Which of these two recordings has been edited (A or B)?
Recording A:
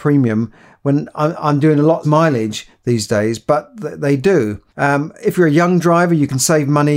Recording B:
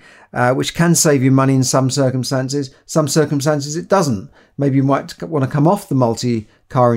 A